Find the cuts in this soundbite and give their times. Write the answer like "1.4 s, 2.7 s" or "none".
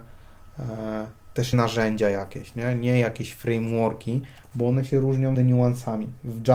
1.5 s, 5.3 s